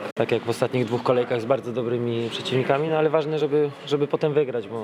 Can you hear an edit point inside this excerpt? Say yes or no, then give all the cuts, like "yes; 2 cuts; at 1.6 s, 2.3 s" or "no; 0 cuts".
no; 0 cuts